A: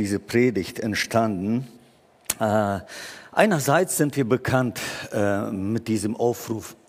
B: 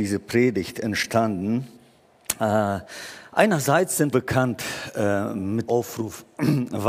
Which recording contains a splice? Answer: B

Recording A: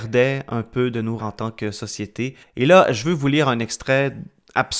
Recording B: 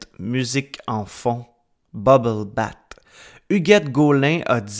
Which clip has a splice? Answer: A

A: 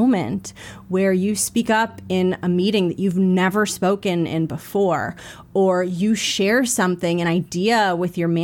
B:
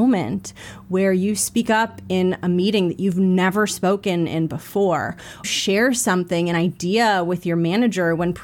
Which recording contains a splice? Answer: B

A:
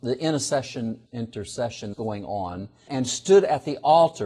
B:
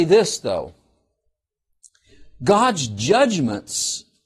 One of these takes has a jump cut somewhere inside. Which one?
A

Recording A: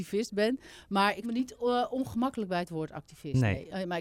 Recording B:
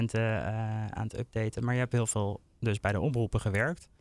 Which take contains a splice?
A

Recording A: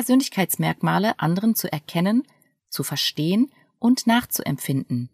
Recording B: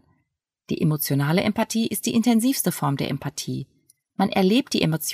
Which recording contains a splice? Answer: A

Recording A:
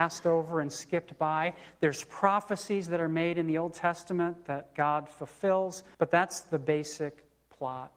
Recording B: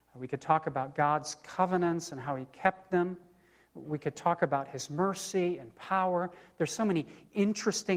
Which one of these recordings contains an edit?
A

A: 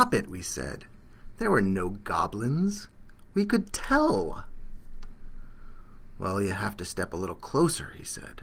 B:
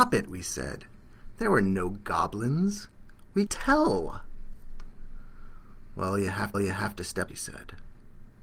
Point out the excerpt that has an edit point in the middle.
B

